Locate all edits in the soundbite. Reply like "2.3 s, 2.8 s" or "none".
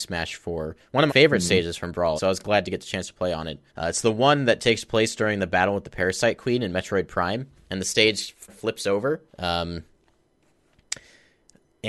1.1 s, 2.2 s, 3.7 s, 8.5 s, 9.3 s